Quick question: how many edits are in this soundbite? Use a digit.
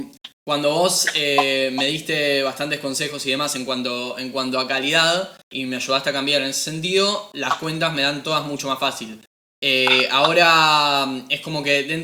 0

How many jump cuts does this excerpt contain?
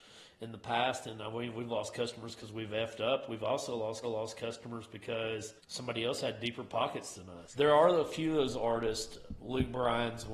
3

